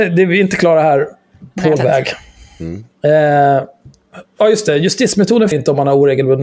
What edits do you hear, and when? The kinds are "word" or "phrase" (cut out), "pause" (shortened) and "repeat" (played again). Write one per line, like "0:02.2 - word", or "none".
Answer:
0:01.8 - word
0:05.5 - word